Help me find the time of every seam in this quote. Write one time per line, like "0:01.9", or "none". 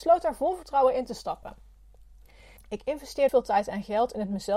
0:03.3